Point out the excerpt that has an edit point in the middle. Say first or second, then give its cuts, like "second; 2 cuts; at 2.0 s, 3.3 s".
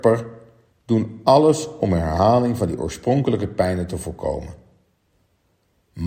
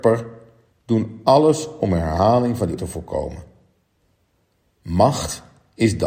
second; 1 cut; at 2.8 s